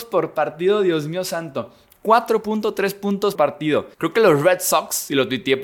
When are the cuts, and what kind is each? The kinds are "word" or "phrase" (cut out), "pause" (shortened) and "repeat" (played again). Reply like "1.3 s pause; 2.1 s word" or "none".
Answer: 3.3 s word; 3.9 s pause